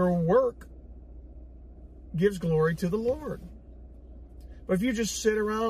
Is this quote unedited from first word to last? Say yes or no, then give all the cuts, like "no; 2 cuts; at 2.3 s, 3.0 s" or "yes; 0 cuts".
yes; 0 cuts